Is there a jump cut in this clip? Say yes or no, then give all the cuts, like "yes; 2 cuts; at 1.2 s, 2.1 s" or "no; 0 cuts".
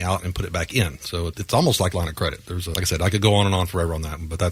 yes; 3 cuts; at 1.3 s, 1.9 s, 2.7 s